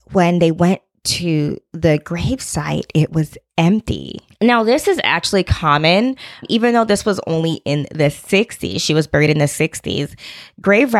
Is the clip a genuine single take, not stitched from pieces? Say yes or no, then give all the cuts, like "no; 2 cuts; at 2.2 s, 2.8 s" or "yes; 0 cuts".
yes; 0 cuts